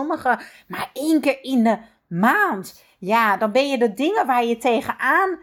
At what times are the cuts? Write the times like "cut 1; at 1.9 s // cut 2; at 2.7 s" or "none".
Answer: none

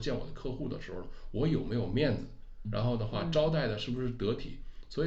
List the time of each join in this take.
cut 1; at 2.6 s

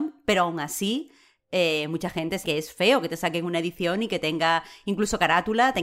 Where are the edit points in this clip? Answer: cut 1; at 2.4 s

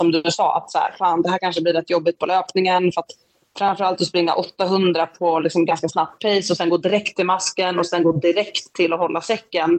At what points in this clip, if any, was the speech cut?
none

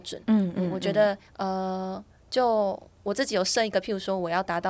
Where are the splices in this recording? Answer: cut 1; at 1.3 s

